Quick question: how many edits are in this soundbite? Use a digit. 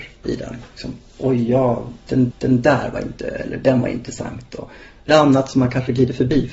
3